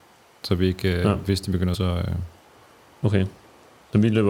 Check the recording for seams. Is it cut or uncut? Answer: cut